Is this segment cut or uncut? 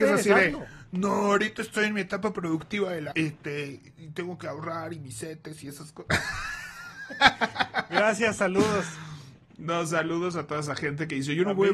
cut